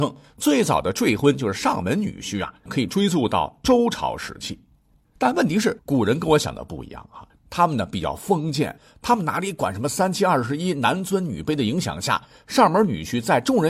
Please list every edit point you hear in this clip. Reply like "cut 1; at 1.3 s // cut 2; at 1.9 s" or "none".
cut 1; at 2.7 s // cut 2; at 5.8 s